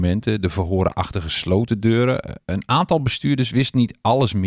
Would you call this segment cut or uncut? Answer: uncut